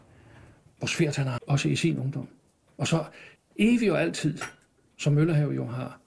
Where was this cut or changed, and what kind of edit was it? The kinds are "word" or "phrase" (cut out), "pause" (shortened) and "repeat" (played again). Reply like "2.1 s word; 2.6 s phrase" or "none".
1.4 s word; 3.4 s pause